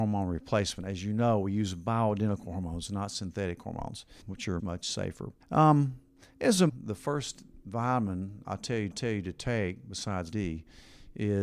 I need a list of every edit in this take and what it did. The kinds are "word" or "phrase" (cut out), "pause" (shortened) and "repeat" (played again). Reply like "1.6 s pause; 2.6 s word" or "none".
4.2 s word; 4.6 s word; 5.4 s pause; 6.7 s word; 8.9 s repeat; 10.3 s word